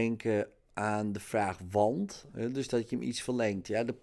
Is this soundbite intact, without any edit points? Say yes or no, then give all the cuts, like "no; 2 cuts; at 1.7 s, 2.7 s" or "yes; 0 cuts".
yes; 0 cuts